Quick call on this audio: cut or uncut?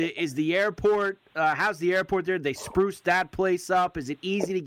uncut